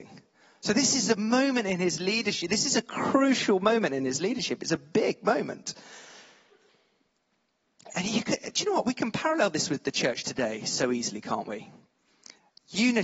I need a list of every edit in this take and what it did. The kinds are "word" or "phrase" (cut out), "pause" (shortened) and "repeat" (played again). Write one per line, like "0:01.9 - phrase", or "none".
none